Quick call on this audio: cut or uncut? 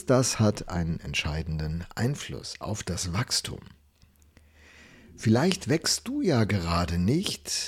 uncut